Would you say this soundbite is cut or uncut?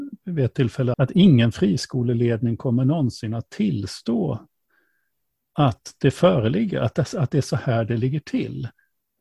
cut